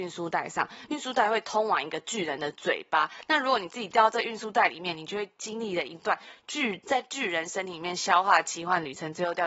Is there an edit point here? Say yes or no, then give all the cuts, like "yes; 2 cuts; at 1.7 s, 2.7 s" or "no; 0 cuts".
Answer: no; 0 cuts